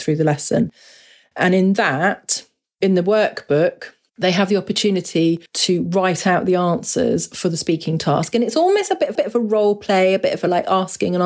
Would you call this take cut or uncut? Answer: cut